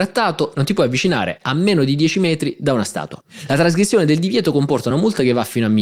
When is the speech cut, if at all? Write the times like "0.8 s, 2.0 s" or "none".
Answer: none